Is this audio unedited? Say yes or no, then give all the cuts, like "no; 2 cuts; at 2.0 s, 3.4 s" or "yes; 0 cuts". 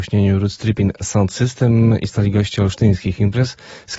yes; 0 cuts